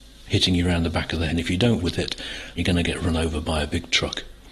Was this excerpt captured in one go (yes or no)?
no